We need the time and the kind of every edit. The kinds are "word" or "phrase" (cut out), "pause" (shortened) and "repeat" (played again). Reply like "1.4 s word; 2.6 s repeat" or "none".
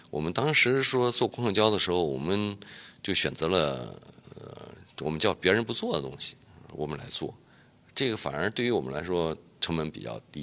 none